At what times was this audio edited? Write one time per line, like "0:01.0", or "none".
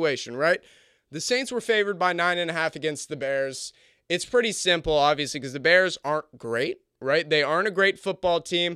none